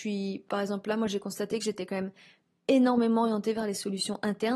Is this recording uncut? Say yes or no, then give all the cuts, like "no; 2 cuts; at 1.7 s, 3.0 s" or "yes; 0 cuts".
yes; 0 cuts